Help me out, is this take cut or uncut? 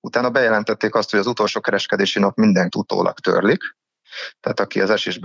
cut